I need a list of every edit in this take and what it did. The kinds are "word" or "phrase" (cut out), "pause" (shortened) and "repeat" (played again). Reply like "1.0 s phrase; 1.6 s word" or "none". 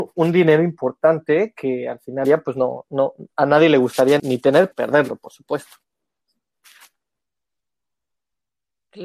2.2 s word; 2.9 s word; 4.2 s word; 4.7 s phrase